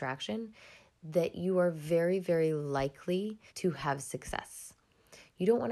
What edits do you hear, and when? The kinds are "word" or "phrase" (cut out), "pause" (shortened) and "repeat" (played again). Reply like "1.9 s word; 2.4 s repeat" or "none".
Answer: 3.5 s pause